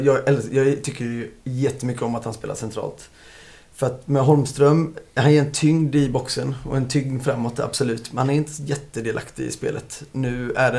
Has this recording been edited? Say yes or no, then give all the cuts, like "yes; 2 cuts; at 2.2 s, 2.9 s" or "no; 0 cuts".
no; 0 cuts